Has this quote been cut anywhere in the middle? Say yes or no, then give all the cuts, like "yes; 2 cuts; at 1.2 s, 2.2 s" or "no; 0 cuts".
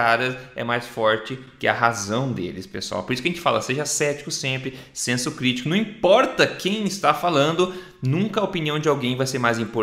no; 0 cuts